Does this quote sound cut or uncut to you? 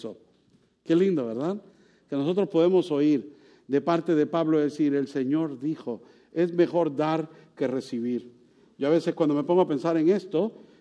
uncut